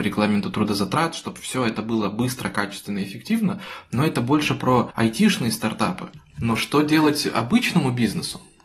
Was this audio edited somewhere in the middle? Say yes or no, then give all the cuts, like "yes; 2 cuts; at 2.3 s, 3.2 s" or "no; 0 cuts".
no; 0 cuts